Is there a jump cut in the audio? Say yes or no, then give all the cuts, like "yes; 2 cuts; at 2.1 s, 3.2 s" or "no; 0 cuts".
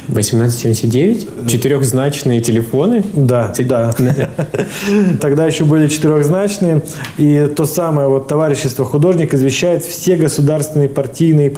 no; 0 cuts